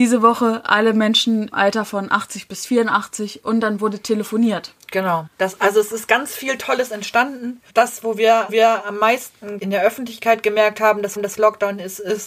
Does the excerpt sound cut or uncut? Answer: cut